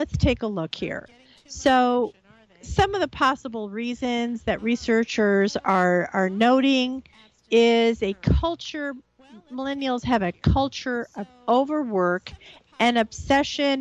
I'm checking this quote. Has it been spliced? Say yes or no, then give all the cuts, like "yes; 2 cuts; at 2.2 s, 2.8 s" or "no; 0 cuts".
no; 0 cuts